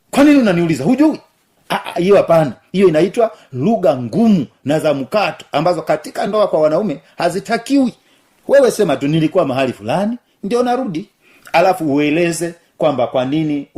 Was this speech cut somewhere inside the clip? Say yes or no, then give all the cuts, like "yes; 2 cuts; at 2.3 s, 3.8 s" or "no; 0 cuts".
no; 0 cuts